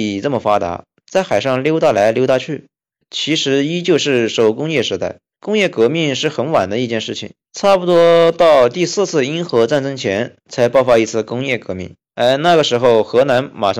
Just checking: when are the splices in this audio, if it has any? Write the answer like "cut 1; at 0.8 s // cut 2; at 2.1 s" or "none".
cut 1; at 5.3 s // cut 2; at 7.4 s // cut 3; at 12.0 s